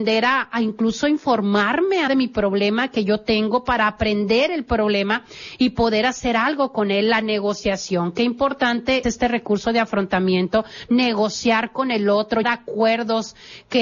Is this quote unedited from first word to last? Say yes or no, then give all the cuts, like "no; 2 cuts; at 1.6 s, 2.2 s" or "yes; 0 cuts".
no; 3 cuts; at 2.1 s, 9.0 s, 12.4 s